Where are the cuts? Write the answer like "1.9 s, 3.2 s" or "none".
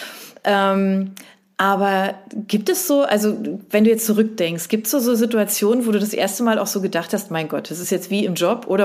none